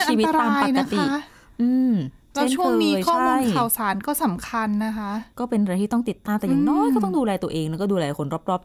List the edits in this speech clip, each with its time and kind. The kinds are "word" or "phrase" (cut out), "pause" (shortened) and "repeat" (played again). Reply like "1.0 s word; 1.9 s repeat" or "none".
none

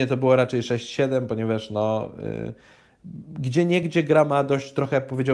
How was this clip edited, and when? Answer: none

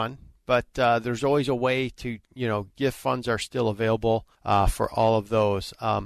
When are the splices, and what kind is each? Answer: 2.7 s pause; 4.3 s pause

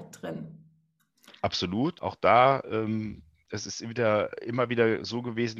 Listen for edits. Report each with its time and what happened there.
none

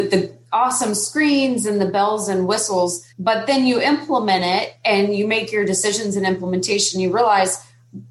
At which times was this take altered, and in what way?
3.1 s pause

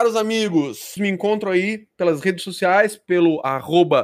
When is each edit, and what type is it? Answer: 1.0 s word

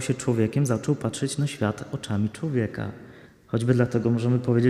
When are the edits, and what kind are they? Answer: 3.3 s pause

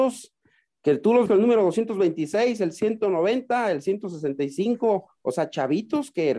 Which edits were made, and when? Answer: 1.3 s word

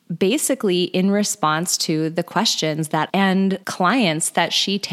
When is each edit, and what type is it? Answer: 3.1 s phrase; 3.6 s pause

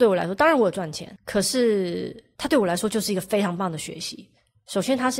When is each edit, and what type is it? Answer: 2.3 s pause

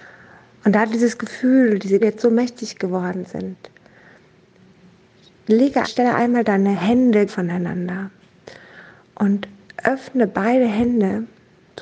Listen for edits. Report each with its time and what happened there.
2.0 s word; 5.8 s word; 7.3 s word

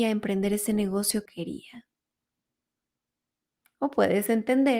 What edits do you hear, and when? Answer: 1.3 s word

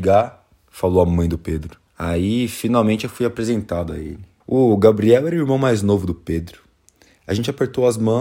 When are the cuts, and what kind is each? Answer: 1.9 s pause; 4.4 s pause

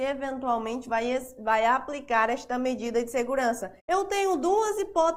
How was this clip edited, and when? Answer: 3.8 s pause

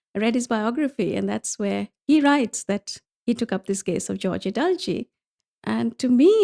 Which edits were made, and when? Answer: 3.0 s pause

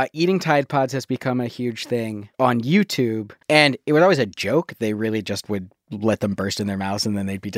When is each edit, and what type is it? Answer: 2.3 s pause; 3.4 s pause

